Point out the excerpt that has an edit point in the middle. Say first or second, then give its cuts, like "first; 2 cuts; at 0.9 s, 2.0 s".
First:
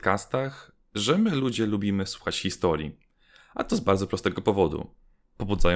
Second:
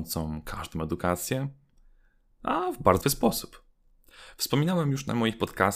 second; 1 cut; at 3.0 s